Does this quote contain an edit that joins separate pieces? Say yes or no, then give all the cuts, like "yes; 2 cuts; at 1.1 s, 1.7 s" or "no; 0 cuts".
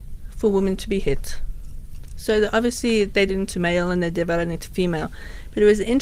yes; 1 cut; at 3.3 s